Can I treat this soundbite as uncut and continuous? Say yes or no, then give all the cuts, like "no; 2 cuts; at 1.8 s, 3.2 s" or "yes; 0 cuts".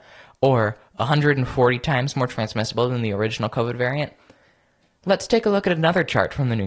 yes; 0 cuts